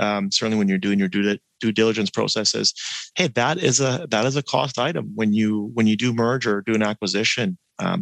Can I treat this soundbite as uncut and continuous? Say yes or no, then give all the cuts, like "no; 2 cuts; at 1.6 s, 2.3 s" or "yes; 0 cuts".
yes; 0 cuts